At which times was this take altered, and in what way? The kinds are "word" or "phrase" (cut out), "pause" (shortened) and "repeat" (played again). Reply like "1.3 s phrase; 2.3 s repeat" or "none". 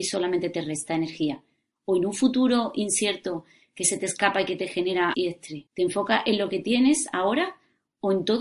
5.1 s word; 5.7 s pause